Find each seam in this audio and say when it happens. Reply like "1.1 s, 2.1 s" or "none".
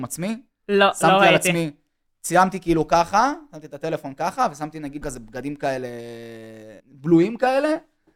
5.0 s, 6.8 s